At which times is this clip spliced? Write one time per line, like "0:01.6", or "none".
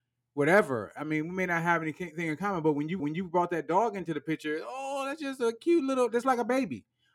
0:03.0

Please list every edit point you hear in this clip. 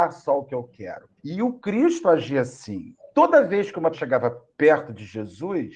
0:01.2
0:03.0
0:03.9

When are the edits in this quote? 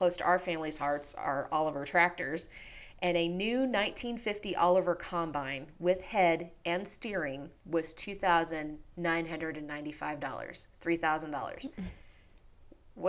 0:07.6
0:10.7

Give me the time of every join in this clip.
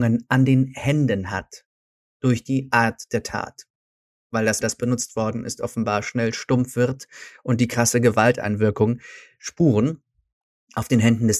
0:04.6

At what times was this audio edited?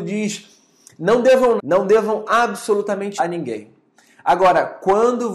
0:01.6
0:03.2

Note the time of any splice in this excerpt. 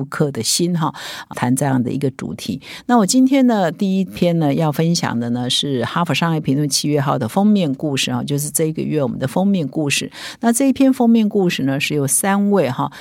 0:01.3

